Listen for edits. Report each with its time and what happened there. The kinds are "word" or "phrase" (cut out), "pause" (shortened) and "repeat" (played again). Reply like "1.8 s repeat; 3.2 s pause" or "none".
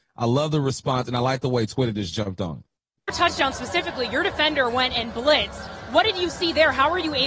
none